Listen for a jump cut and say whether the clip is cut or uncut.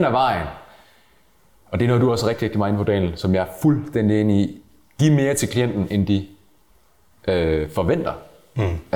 uncut